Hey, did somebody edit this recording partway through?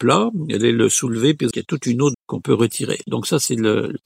yes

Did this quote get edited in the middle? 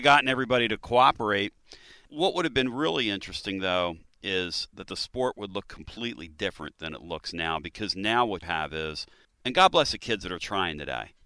yes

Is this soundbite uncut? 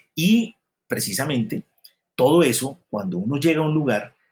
yes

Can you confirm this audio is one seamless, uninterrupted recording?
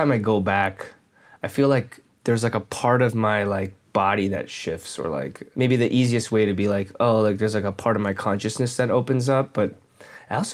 yes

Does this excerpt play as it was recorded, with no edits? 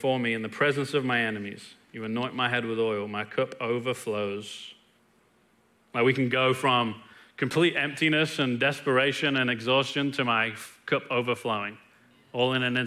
no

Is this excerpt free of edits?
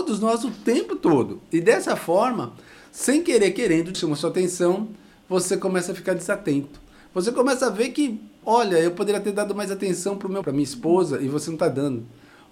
no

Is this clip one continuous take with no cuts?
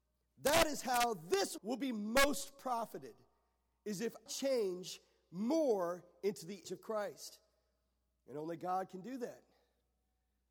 no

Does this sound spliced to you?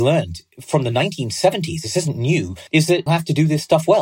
yes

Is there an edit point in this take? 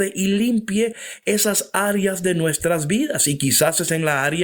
no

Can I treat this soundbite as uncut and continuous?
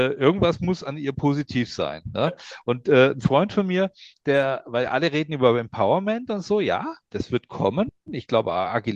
yes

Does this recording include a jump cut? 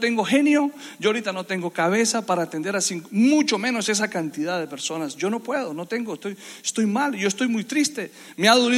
no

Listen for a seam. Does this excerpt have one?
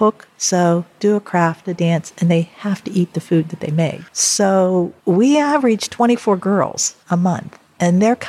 yes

